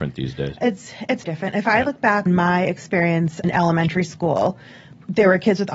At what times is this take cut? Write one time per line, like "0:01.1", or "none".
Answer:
0:01.2
0:02.3
0:03.4